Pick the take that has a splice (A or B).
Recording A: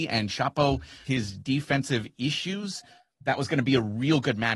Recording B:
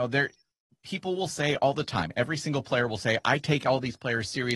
A